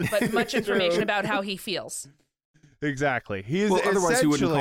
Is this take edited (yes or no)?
no